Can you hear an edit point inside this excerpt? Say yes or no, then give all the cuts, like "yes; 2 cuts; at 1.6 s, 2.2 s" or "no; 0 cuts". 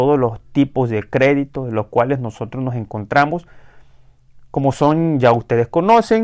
no; 0 cuts